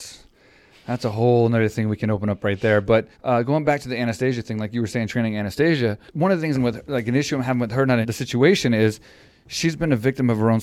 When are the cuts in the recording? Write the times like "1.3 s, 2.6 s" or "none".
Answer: 3.1 s, 6.1 s, 6.5 s, 8.0 s